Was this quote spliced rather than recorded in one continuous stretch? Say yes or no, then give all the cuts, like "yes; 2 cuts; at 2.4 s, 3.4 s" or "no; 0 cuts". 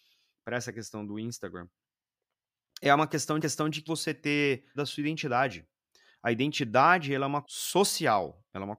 yes; 4 cuts; at 3.4 s, 3.9 s, 4.8 s, 7.4 s